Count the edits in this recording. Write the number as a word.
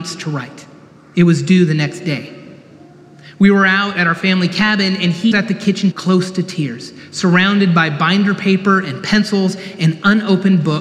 two